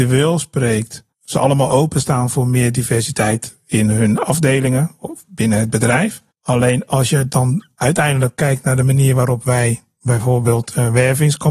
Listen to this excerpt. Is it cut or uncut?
cut